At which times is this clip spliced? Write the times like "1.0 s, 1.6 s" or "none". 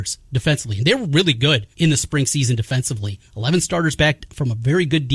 1.7 s, 3.3 s